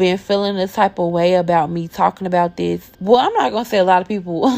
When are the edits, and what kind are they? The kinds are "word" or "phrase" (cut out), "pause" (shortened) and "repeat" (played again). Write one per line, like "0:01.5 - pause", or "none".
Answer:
0:02.9 - pause